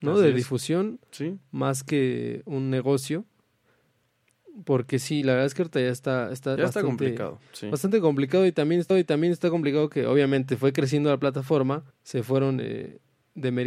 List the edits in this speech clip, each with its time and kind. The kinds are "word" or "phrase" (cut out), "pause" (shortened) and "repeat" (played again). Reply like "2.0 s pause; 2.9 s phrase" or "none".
6.6 s word; 8.9 s repeat; 11.9 s pause